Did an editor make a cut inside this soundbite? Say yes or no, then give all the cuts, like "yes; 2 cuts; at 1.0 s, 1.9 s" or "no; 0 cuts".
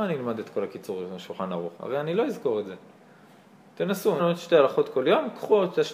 yes; 2 cuts; at 1.7 s, 4.2 s